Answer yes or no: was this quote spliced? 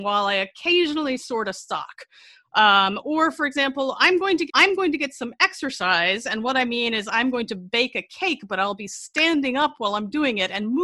yes